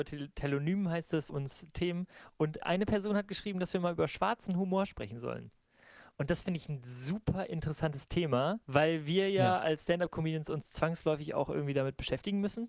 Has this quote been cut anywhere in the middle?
yes; 3 cuts; at 1.3 s, 2.6 s, 8.6 s

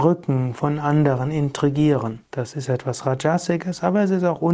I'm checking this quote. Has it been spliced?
yes; 1 cut; at 2.3 s

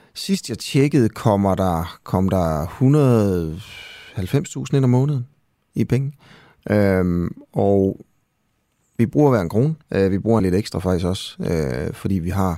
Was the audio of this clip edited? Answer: yes; 2 cuts; at 9.8 s, 10.4 s

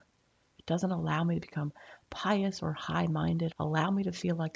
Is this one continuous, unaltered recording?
no; 1 cut; at 3.5 s

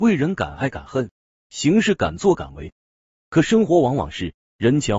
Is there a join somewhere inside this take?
no; 0 cuts

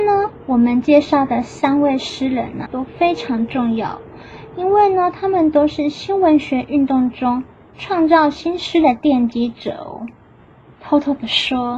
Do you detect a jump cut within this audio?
yes; 1 cut; at 2.7 s

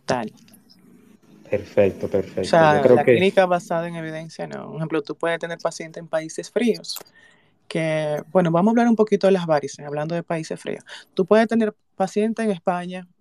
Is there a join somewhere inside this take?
no; 0 cuts

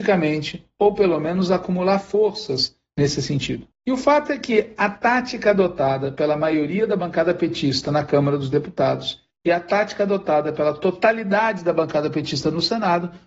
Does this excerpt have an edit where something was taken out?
no; 0 cuts

